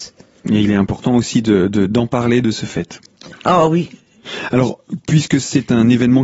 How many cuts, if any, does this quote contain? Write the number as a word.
zero